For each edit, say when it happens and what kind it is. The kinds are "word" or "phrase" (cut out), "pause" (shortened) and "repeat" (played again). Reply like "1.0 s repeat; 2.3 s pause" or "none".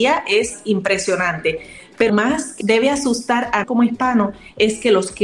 2.1 s word; 2.6 s word; 3.6 s word